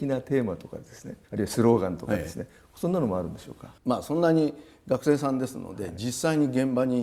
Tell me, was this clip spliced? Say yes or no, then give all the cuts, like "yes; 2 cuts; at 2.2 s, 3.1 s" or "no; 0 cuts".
yes; 2 cuts; at 1.2 s, 3.8 s